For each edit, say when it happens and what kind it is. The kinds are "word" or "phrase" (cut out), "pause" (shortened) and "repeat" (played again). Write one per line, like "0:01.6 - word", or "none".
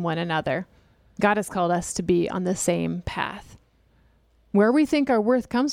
none